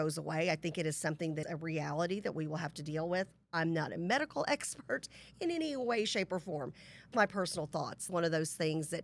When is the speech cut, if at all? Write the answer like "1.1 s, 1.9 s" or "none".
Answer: 1.4 s, 7.1 s, 8.1 s